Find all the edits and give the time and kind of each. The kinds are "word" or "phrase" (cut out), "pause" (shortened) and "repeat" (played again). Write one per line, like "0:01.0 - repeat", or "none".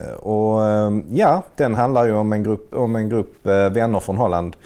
none